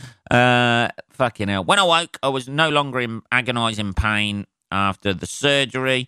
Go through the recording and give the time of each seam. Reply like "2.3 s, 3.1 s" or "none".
none